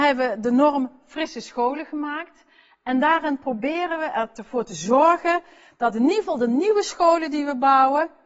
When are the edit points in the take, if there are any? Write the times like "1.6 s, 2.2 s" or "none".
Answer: none

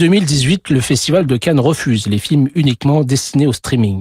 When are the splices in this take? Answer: none

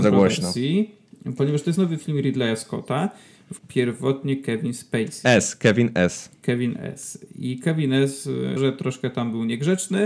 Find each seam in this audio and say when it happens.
3.6 s, 8.6 s

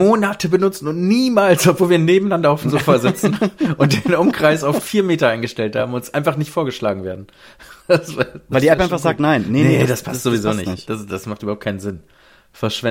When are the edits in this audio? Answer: 7.8 s

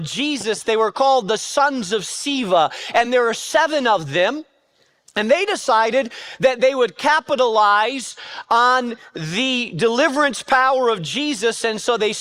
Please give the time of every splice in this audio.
none

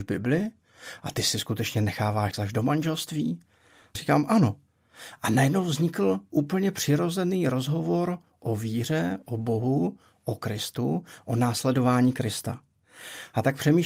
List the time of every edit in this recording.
2.3 s, 3.9 s

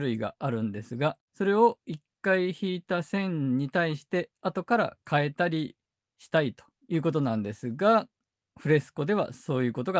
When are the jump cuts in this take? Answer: 1.2 s, 5.0 s, 6.7 s

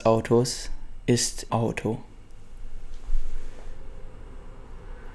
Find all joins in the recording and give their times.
1.5 s

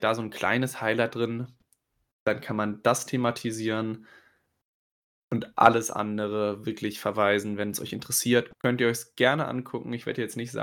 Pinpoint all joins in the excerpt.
8.5 s

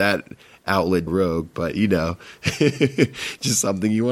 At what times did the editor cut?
1.1 s, 1.5 s

